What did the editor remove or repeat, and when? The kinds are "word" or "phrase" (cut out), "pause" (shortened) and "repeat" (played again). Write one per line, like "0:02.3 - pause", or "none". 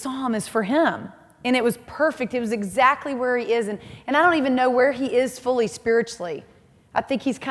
none